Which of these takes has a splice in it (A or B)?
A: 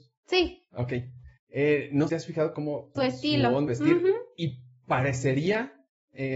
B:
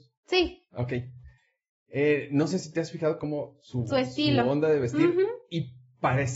A